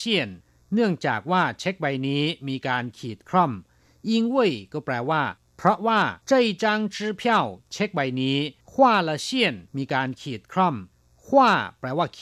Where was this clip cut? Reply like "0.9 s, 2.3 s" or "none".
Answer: 6.2 s, 8.6 s, 9.7 s